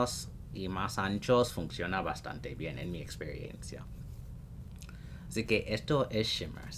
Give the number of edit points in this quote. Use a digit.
0